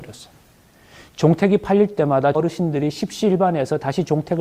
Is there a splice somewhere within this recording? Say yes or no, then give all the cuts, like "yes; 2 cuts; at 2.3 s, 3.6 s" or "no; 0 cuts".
yes; 1 cut; at 2.3 s